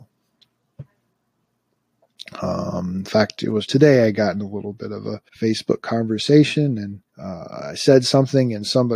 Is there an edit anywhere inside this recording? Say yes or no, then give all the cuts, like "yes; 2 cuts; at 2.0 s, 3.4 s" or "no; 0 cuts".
yes; 3 cuts; at 3.7 s, 5.3 s, 7.1 s